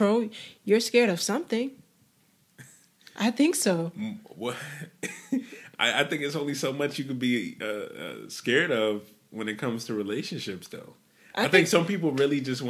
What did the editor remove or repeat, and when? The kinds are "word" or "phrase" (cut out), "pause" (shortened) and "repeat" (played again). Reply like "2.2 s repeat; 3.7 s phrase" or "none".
none